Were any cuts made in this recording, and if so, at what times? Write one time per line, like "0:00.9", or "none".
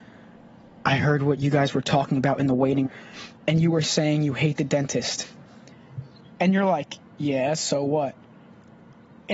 0:02.8